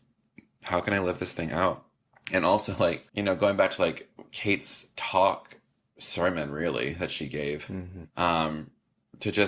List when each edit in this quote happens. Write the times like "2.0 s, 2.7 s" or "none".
3.1 s, 8.1 s